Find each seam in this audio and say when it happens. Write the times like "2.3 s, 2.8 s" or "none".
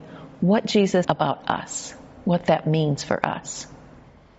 1.0 s